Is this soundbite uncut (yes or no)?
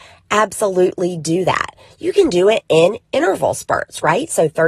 yes